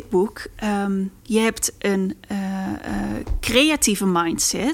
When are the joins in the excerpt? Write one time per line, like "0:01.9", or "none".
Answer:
0:01.2